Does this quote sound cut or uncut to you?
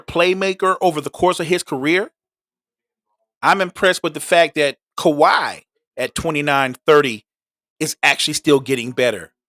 uncut